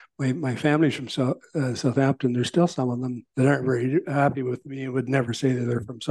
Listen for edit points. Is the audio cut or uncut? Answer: cut